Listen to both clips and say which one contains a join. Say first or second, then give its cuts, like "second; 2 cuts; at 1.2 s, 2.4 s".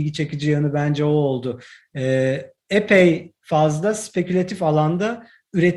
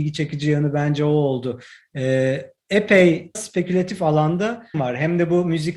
second; 2 cuts; at 3.3 s, 4.7 s